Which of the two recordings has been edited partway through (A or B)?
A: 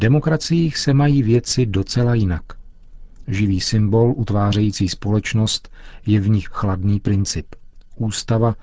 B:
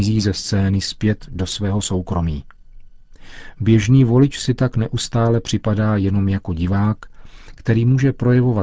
A